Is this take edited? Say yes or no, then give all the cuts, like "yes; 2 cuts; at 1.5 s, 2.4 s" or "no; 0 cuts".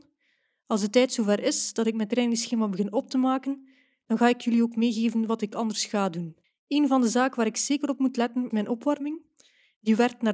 yes; 2 cuts; at 6.4 s, 8.5 s